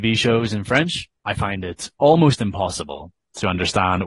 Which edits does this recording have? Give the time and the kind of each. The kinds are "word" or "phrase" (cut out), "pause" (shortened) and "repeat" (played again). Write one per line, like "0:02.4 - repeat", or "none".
0:01.2 - pause